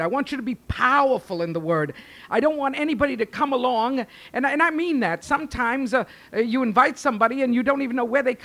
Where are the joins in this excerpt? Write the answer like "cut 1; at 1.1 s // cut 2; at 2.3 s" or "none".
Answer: none